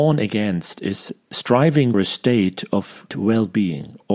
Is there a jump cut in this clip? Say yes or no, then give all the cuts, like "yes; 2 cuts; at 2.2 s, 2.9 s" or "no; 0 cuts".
yes; 2 cuts; at 1.9 s, 3.1 s